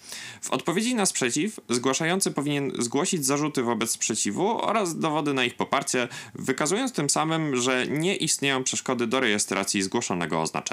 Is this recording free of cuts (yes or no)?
yes